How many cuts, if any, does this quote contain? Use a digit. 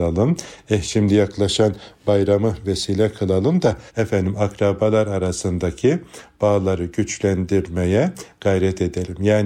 1